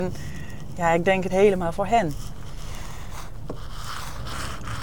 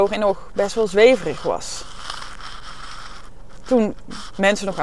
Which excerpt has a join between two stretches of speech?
first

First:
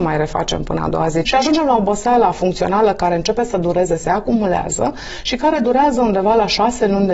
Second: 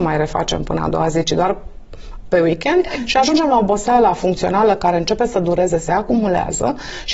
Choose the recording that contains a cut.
first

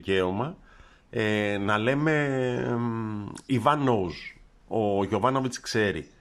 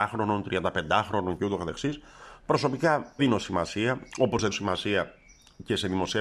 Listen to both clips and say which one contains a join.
second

